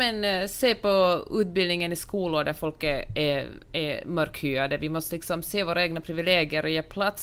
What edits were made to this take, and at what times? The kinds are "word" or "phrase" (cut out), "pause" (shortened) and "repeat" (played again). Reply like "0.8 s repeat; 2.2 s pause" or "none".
none